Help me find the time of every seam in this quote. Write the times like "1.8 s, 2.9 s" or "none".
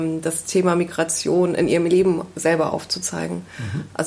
none